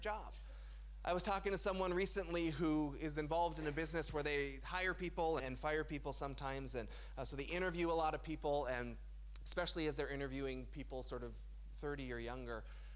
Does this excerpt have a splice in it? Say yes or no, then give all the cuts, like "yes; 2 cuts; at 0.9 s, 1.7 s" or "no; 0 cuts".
yes; 2 cuts; at 4.6 s, 5.4 s